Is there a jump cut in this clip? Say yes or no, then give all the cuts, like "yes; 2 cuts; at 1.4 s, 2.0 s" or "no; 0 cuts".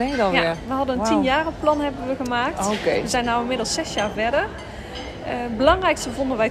no; 0 cuts